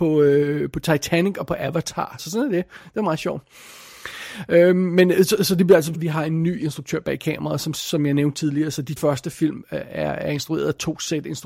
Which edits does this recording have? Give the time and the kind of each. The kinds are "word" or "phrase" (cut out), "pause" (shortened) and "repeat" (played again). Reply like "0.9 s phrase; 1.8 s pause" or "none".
2.2 s word; 5.9 s word; 9.0 s phrase